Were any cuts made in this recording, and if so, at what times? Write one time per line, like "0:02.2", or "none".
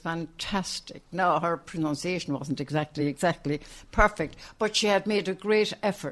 none